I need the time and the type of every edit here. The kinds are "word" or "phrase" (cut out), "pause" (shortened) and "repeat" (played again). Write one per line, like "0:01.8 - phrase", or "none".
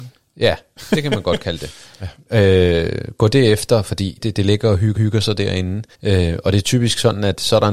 0:04.2 - word
0:05.0 - repeat
0:05.9 - pause